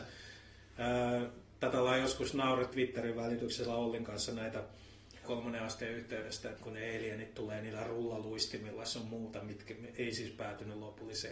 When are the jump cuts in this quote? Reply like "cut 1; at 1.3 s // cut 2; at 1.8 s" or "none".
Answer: cut 1; at 2.7 s // cut 2; at 5.2 s // cut 3; at 6.6 s

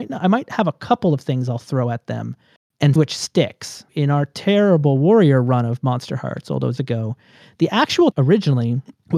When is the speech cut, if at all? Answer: cut 1; at 3.0 s // cut 2; at 3.9 s // cut 3; at 6.8 s // cut 4; at 8.1 s

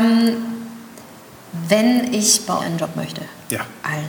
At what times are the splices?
cut 1; at 2.6 s

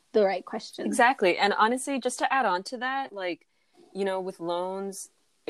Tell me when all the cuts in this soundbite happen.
none

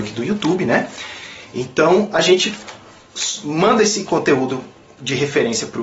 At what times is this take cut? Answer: none

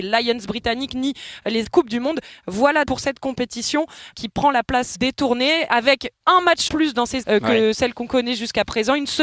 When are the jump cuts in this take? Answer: cut 1; at 1.6 s // cut 2; at 2.8 s // cut 3; at 4.1 s // cut 4; at 4.9 s // cut 5; at 6.2 s // cut 6; at 6.7 s // cut 7; at 7.2 s

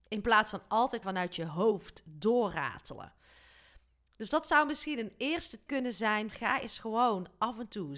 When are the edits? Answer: cut 1; at 1.0 s // cut 2; at 5.7 s // cut 3; at 6.3 s

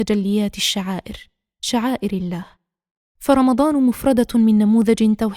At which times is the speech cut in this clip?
none

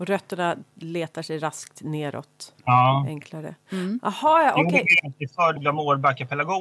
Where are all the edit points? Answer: cut 1; at 2.5 s // cut 2; at 5.6 s

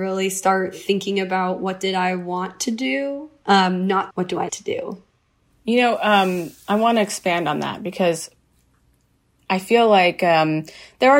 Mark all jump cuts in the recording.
cut 1; at 4.1 s // cut 2; at 4.5 s

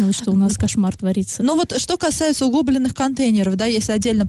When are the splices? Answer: none

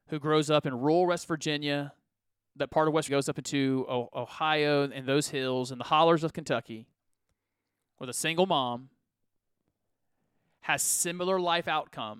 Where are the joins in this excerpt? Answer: cut 1; at 3.1 s

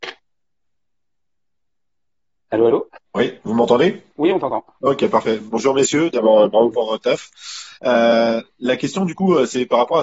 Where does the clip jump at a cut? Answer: cut 1; at 3.1 s // cut 2; at 4.1 s // cut 3; at 7.8 s

